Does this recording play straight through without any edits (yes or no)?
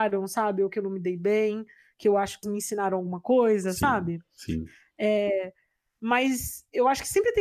no